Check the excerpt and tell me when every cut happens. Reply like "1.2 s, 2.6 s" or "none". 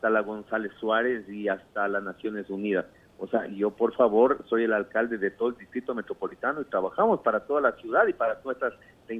none